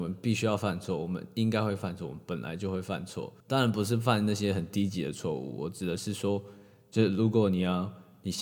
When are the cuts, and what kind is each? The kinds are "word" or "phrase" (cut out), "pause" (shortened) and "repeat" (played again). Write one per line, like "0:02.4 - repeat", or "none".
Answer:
0:03.4 - pause